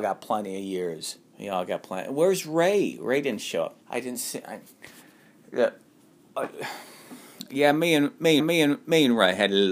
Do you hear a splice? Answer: yes; 3 cuts; at 1.3 s, 3.8 s, 8.4 s

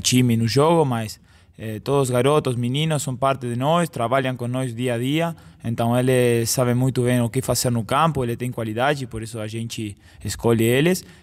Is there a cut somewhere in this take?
no; 0 cuts

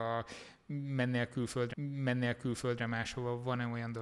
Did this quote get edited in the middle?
yes; 1 cut; at 1.7 s

